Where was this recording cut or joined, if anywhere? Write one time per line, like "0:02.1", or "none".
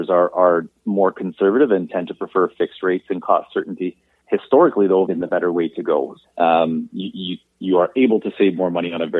0:04.2
0:05.1
0:06.2